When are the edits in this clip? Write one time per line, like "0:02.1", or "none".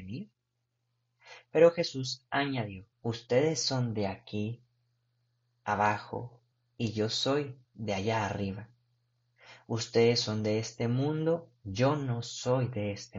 0:02.9
0:06.5
0:07.6

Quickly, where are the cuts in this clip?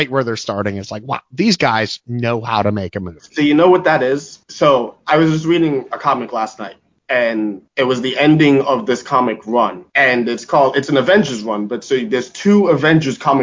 0:04.4
0:07.7
0:09.9

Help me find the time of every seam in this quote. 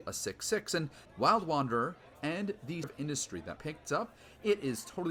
0:01.0
0:02.1
0:02.8
0:03.6

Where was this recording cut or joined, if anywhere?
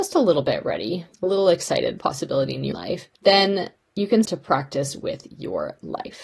0:01.1
0:02.0
0:02.7
0:03.2
0:04.2

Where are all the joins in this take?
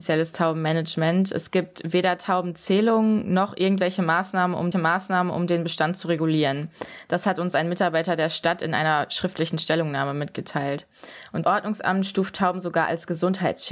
0:04.7
0:11.4

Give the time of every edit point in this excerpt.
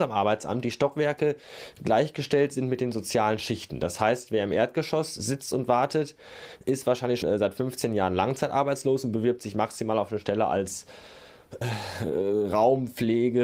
0:07.2
0:11.6

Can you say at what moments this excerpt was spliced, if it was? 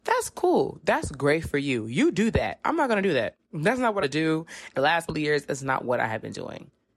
0:04.0
0:04.7
0:05.1

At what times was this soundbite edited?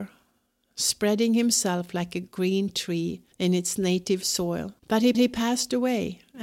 0:03.3
0:04.8
0:05.1

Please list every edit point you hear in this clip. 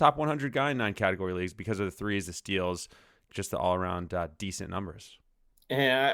none

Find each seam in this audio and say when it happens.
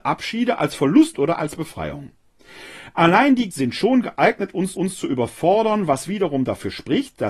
0:01.1
0:03.5
0:04.7

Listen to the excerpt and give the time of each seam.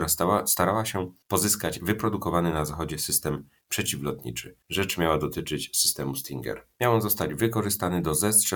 0:01.2
0:04.6

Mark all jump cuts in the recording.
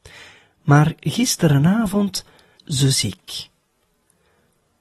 0:02.6

